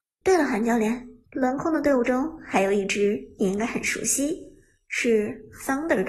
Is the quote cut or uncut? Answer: cut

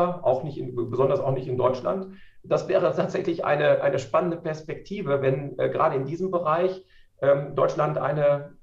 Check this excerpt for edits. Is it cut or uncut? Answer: uncut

